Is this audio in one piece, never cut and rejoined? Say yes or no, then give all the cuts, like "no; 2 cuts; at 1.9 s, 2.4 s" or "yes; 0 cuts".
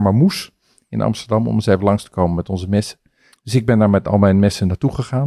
yes; 0 cuts